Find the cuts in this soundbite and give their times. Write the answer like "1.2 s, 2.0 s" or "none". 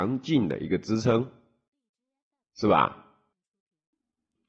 none